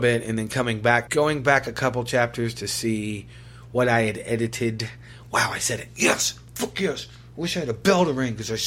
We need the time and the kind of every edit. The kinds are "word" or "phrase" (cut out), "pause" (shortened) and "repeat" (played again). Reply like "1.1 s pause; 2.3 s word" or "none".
1.1 s phrase